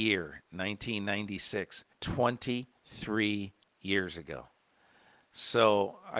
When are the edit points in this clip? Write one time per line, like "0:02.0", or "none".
0:01.9

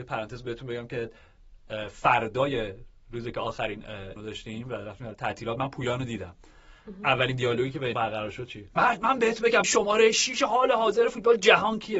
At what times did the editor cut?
0:04.2
0:05.1
0:07.9
0:08.7
0:09.6

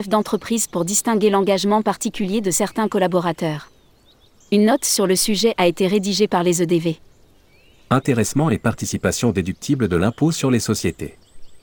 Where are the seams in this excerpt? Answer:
none

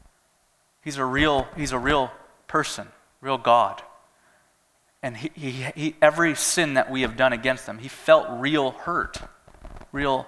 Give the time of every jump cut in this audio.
none

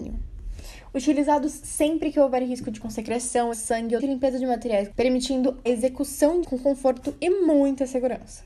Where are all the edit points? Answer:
0:02.8
0:03.5
0:04.0
0:04.9
0:05.7
0:06.4

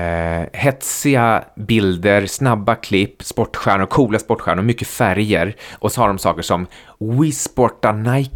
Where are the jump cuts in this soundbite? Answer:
0:05.9

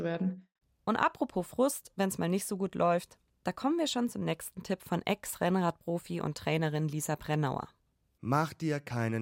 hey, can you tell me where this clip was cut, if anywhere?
none

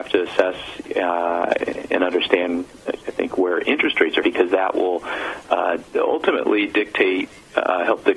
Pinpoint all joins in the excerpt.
0:04.2
0:05.9

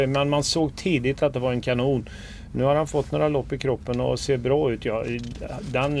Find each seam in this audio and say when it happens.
none

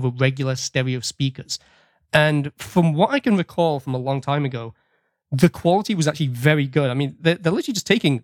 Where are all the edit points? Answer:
none

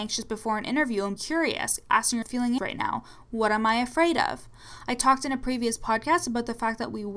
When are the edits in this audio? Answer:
0:01.2
0:02.2
0:02.6

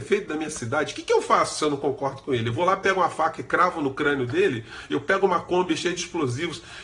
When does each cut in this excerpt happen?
none

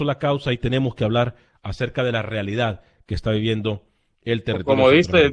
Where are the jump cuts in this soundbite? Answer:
none

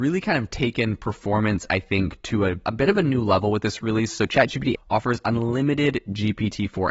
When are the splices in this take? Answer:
0:04.7

